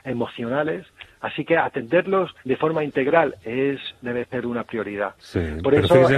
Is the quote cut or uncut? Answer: cut